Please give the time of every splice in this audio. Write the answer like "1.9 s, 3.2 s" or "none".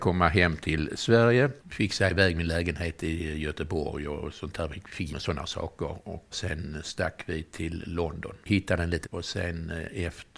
1.6 s, 5.1 s, 8.4 s, 9.0 s